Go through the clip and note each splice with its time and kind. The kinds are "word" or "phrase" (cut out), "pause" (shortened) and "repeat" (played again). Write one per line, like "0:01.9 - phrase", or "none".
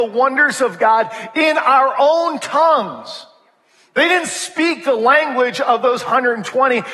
none